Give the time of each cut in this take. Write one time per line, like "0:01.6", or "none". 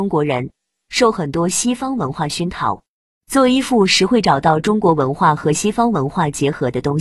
none